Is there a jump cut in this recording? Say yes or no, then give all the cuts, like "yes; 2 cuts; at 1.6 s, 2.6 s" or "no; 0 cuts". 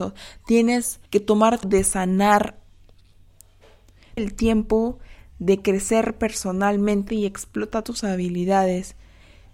yes; 5 cuts; at 1.1 s, 1.6 s, 4.2 s, 7.1 s, 7.8 s